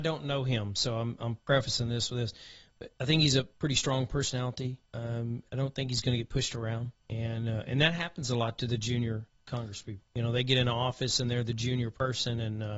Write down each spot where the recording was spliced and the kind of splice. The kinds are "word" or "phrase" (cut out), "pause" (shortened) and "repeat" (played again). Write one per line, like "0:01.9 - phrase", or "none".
0:04.8 - pause
0:07.0 - pause
0:10.1 - pause